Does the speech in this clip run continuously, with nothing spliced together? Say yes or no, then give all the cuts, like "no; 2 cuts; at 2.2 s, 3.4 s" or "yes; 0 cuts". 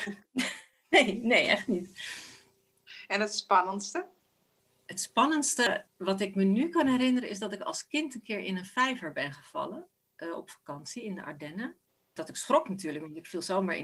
yes; 0 cuts